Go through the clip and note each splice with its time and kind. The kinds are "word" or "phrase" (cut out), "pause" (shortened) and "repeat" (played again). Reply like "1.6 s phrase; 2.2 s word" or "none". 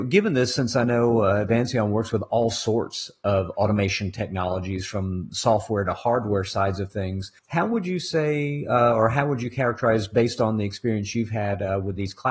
7.4 s pause